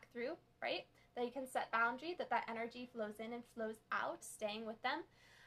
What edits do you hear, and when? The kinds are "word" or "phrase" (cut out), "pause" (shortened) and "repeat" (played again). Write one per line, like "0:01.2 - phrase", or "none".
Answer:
0:01.7 - word
0:04.2 - word